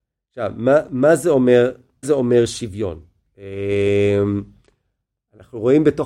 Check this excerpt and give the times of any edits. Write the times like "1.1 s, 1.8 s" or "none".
2.0 s